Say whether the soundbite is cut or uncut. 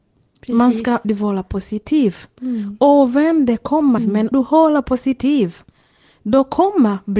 cut